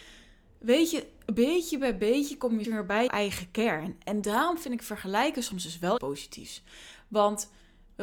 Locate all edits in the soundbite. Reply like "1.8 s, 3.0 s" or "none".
2.6 s, 3.1 s, 4.2 s, 6.0 s